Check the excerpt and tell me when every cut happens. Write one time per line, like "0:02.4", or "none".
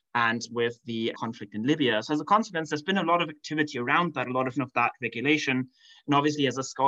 0:01.1
0:04.5